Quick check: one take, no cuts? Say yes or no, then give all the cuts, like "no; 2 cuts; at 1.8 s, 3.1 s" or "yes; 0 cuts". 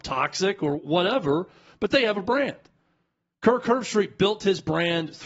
yes; 0 cuts